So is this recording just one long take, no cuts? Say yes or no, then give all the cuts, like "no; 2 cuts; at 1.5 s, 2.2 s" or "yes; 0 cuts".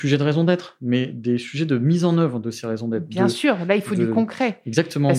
yes; 0 cuts